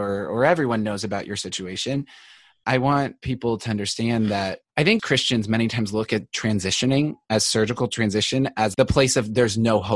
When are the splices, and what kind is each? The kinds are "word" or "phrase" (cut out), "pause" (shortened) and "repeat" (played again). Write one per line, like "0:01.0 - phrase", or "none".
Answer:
0:04.7 - pause
0:08.7 - word

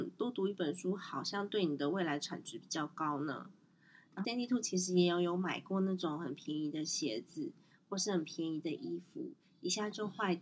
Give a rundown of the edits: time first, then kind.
0:04.2 - word

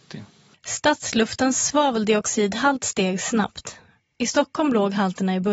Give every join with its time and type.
none

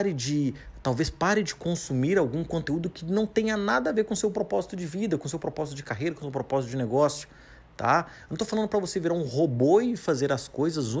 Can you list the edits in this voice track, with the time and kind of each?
none

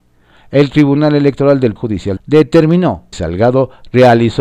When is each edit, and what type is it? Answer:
0:01.8 - word
0:02.2 - phrase
0:03.1 - word

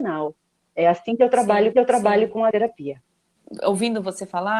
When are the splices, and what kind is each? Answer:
0:01.7 - repeat
0:02.5 - word

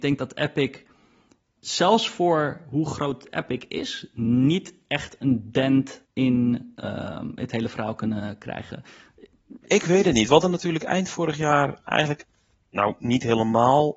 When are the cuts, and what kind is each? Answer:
0:01.6 - word
0:06.0 - pause

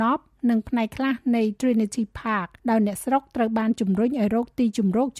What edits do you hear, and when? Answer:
0:02.6 - pause

